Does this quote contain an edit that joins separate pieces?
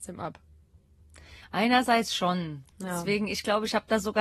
yes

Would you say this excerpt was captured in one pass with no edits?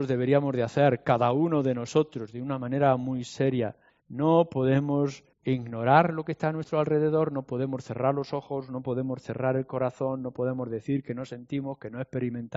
no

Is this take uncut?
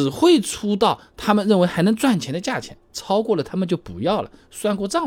no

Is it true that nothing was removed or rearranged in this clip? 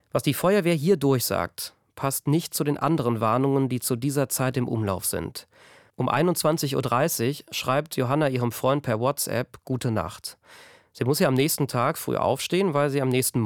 yes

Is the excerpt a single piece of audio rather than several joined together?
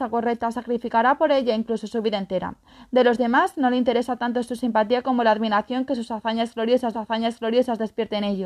no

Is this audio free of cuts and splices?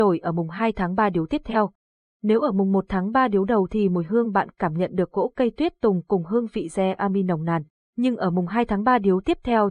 yes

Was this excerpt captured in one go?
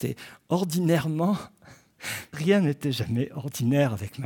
no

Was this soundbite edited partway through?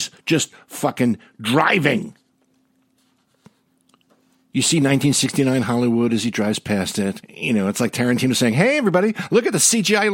no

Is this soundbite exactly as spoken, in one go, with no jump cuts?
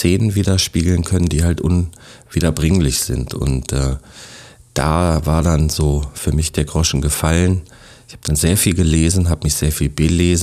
yes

